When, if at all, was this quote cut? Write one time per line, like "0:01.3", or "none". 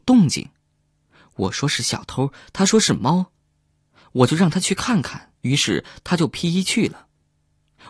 0:05.4